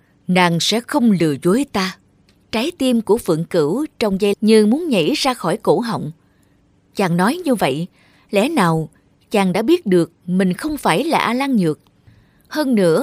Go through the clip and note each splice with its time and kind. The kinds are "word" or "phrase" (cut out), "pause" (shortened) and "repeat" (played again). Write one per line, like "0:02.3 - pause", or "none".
0:02.1 - pause
0:04.3 - word